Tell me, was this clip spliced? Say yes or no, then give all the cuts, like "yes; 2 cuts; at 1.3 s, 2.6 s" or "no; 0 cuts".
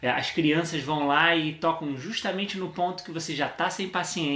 no; 0 cuts